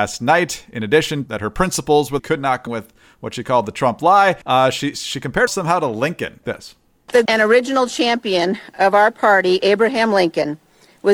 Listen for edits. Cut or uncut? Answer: cut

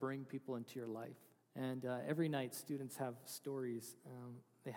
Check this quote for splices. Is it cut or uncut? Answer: cut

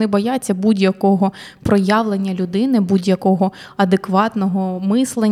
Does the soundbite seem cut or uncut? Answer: uncut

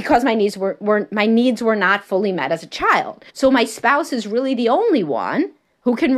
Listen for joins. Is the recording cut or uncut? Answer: cut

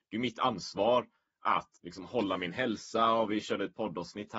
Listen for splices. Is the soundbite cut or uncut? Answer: cut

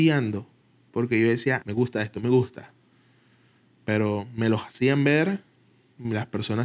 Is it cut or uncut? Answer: cut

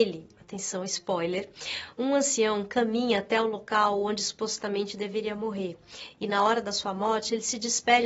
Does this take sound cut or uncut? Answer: uncut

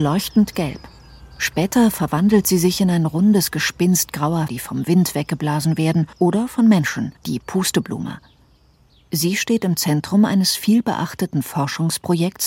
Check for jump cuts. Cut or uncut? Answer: cut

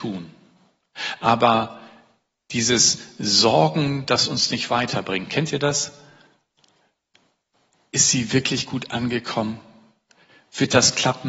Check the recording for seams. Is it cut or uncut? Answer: uncut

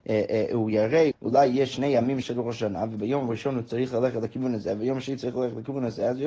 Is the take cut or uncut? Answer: cut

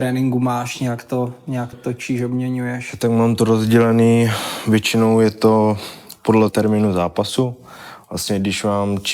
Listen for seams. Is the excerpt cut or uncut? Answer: cut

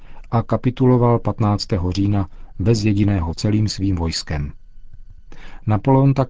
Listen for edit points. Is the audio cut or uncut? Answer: cut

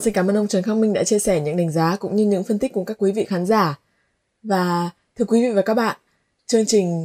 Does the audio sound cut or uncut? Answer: uncut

